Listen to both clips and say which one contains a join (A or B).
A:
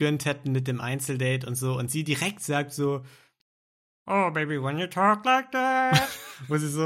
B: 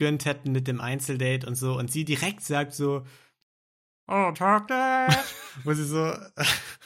B